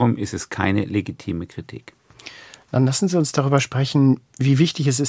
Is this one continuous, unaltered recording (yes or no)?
yes